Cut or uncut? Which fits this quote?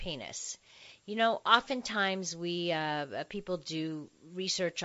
uncut